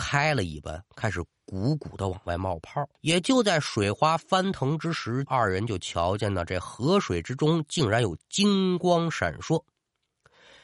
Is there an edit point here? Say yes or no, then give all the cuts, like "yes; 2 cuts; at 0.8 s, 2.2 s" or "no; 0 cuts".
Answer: yes; 2 cuts; at 3.0 s, 5.3 s